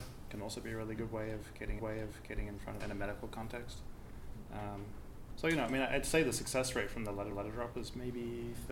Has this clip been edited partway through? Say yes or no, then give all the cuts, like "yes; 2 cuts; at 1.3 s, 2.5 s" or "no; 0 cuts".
yes; 3 cuts; at 1.8 s, 2.8 s, 7.3 s